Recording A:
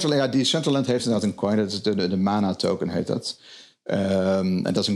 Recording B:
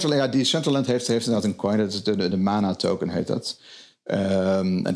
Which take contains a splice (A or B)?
A